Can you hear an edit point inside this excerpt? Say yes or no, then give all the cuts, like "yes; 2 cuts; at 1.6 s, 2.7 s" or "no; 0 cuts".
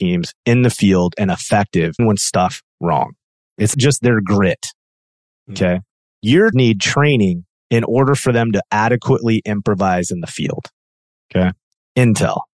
yes; 4 cuts; at 2.0 s, 2.7 s, 3.7 s, 6.5 s